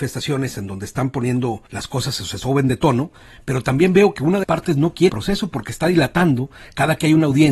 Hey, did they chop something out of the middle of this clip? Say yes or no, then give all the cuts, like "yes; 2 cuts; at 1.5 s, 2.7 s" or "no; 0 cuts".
yes; 3 cuts; at 1.7 s, 4.4 s, 5.1 s